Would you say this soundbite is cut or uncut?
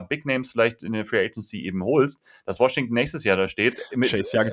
uncut